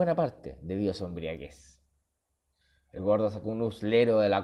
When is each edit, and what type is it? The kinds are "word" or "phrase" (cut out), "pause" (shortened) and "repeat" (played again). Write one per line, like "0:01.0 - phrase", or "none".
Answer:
none